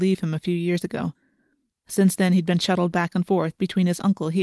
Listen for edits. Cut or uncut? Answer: uncut